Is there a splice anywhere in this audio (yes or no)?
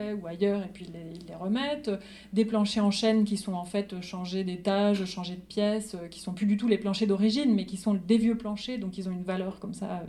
no